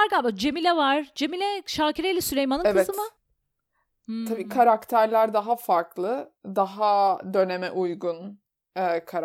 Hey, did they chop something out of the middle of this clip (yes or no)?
yes